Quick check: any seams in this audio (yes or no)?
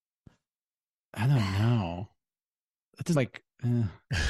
yes